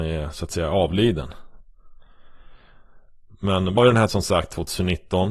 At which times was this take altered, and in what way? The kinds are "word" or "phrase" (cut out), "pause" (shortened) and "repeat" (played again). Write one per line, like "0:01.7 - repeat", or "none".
0:03.8 - word
0:04.1 - word